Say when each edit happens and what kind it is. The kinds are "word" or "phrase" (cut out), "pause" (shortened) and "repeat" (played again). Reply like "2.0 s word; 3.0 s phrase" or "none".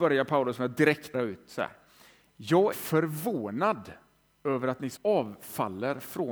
1.1 s word; 2.7 s word; 5.0 s word